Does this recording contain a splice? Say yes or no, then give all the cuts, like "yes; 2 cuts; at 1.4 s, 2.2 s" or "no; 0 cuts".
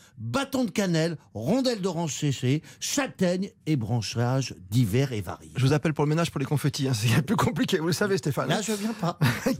no; 0 cuts